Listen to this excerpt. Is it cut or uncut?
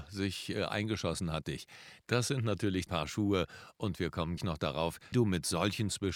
cut